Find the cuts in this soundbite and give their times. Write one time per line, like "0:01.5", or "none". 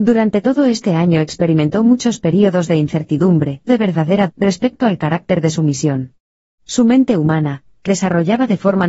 0:03.7
0:04.3
0:07.9